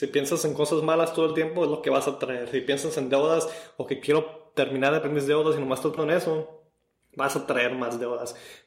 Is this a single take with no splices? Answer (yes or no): no